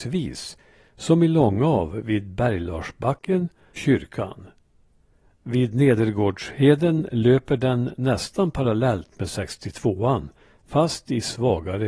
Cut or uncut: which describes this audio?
cut